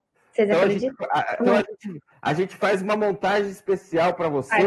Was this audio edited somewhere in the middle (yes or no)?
yes